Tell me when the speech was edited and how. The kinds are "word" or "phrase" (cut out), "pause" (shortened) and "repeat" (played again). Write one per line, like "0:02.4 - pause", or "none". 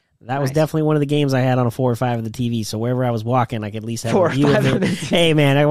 none